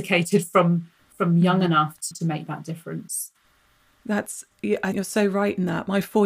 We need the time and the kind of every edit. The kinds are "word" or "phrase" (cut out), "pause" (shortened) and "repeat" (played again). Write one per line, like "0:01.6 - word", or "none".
0:02.1 - word
0:04.9 - word